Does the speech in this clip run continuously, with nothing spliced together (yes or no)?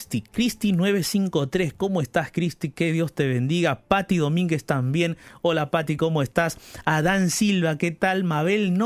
yes